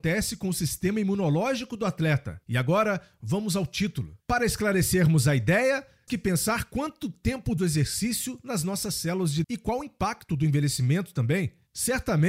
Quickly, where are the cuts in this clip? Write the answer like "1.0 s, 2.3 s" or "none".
2.4 s, 4.2 s, 6.1 s, 7.6 s, 9.4 s